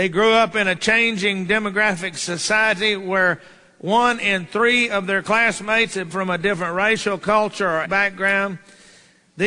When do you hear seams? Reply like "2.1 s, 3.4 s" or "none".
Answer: 6.1 s, 7.8 s